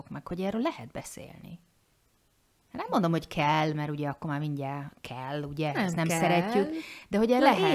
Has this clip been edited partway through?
no; 0 cuts

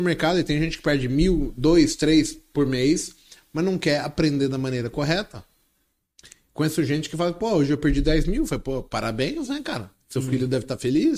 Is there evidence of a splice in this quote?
no; 0 cuts

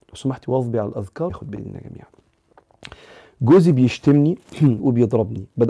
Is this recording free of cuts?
no; 2 cuts; at 1.3 s, 4.8 s

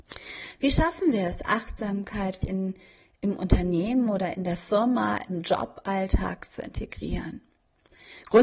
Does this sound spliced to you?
yes; 1 cut; at 2.4 s

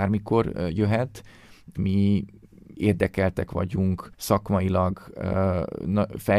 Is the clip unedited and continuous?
no; 3 cuts; at 1.7 s, 2.7 s, 4.1 s

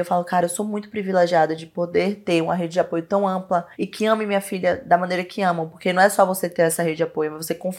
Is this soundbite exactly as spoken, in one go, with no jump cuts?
no; 1 cut; at 3.7 s

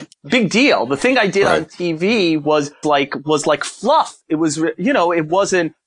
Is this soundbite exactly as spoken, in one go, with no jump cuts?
no; 1 cut; at 2.8 s

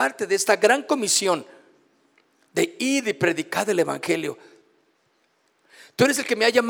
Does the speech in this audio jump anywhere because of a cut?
no; 0 cuts

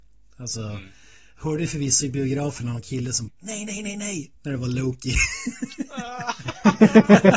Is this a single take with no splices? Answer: no; 2 cuts; at 3.3 s, 3.7 s

